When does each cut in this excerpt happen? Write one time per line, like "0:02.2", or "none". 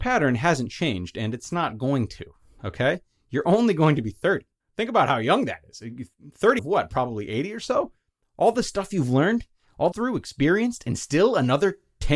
0:04.6
0:06.6
0:09.9